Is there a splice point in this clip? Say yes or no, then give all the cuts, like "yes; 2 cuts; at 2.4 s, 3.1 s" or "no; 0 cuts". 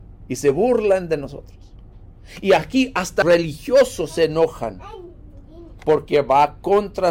yes; 1 cut; at 3.2 s